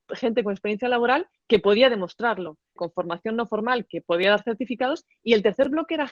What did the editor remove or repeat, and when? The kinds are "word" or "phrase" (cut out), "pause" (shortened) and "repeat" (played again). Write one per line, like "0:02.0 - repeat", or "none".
0:02.8 - word